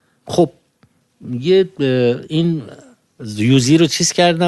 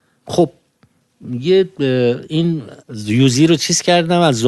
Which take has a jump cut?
second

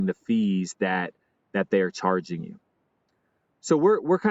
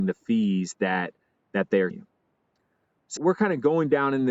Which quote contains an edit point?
second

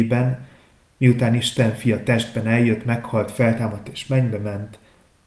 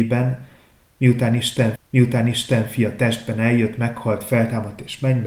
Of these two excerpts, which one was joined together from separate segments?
second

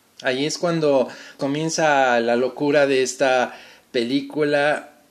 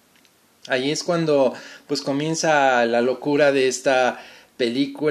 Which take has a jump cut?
first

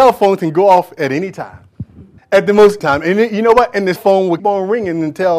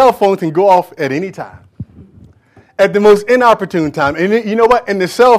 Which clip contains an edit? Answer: first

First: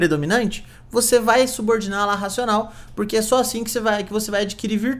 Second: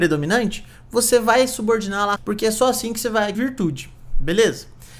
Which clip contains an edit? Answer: second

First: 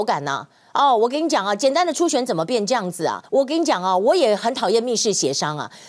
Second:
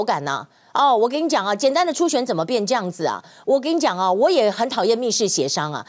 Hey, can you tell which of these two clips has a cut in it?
first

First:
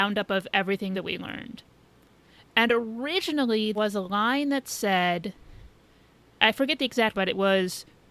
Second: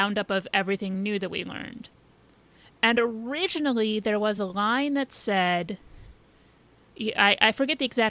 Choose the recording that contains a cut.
first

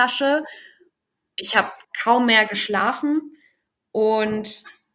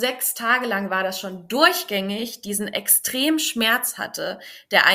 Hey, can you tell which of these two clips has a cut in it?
first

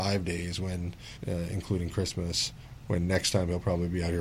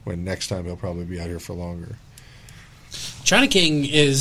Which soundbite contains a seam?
first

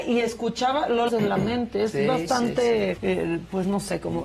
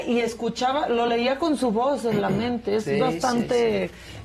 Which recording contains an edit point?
first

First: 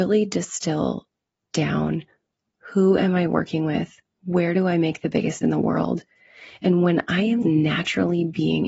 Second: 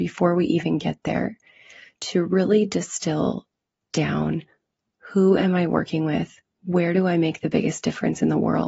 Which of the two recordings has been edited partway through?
first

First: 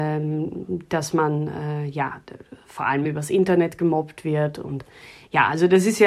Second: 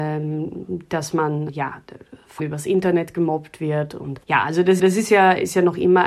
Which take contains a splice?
second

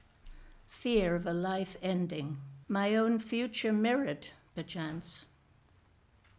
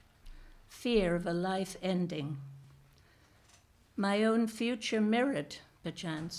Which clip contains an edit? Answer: first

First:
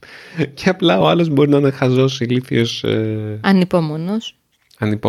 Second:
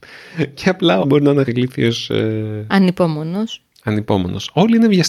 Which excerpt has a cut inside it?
second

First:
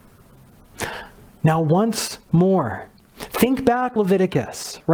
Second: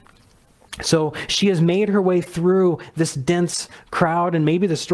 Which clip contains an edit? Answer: first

